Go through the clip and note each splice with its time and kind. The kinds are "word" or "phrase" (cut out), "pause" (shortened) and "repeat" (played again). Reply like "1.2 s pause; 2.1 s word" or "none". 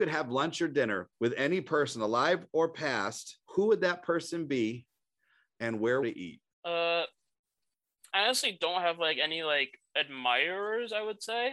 1.1 s pause; 3.4 s pause; 6.0 s phrase; 6.5 s pause